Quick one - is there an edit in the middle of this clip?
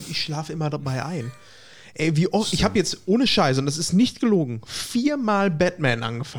no; 0 cuts

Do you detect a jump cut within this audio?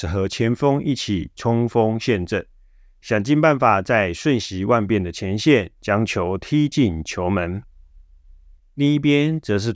no; 0 cuts

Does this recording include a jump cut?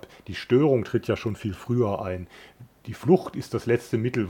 no; 0 cuts

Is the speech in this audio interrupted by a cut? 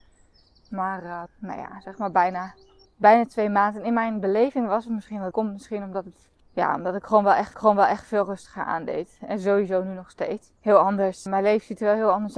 yes; 7 cuts; at 1.3 s, 2.8 s, 5.3 s, 6.4 s, 7.5 s, 10.6 s, 11.3 s

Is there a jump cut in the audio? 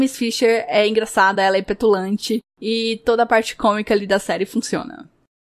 no; 0 cuts

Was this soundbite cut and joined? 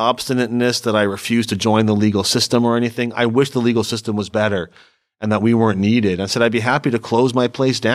no; 0 cuts

